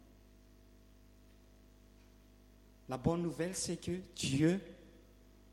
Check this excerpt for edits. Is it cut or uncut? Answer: uncut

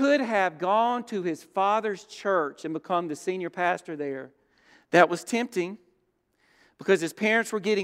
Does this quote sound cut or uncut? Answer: uncut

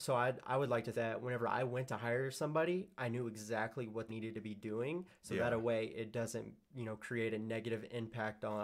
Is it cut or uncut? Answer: cut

